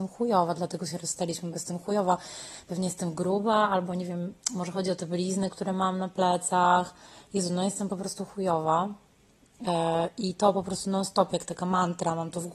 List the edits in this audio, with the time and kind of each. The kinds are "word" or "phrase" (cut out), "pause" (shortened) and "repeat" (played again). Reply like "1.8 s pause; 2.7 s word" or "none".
none